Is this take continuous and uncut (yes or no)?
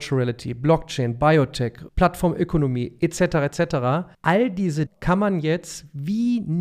no